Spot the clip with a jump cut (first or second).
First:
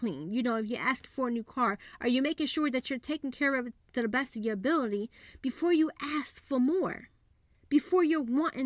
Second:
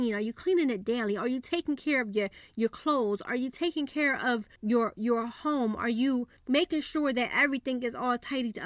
second